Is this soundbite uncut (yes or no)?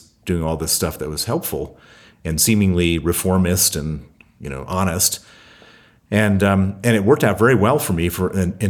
yes